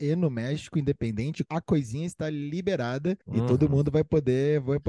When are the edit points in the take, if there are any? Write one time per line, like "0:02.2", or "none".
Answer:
0:01.5
0:03.2